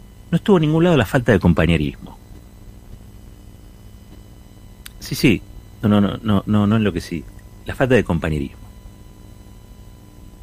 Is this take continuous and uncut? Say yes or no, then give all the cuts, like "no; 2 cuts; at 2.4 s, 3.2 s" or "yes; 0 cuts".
yes; 0 cuts